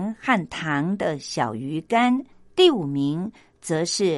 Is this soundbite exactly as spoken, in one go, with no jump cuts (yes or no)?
no